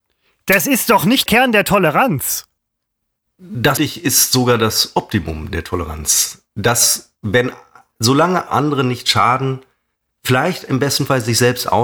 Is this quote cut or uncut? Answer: cut